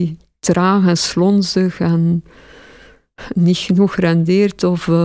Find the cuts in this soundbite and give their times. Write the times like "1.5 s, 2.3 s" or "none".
none